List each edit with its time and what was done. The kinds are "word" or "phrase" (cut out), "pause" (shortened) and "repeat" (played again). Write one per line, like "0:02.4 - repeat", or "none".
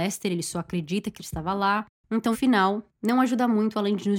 0:01.2 - word
0:02.3 - word